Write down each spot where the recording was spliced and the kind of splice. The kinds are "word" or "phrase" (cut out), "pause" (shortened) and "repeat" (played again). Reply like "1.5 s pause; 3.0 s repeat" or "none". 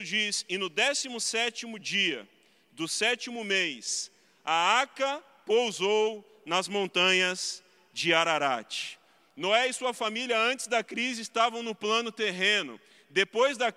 none